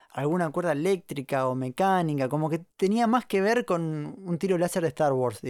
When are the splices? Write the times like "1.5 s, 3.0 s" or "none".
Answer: 2.7 s